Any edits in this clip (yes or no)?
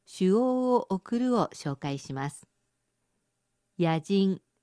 no